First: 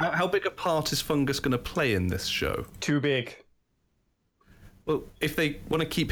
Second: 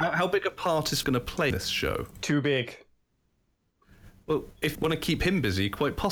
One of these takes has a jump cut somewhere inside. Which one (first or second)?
second